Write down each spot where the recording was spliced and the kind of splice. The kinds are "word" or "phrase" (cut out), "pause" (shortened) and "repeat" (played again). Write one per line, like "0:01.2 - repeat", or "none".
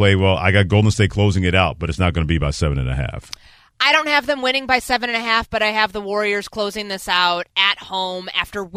none